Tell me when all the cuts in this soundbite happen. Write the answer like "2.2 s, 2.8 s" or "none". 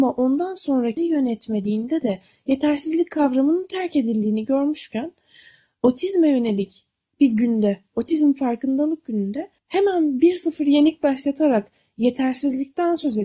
1.0 s, 9.6 s